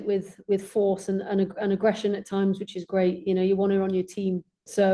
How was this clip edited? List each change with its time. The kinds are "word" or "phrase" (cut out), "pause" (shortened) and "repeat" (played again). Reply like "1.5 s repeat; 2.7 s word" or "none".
none